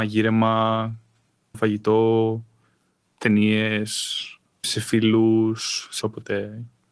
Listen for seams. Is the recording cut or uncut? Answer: cut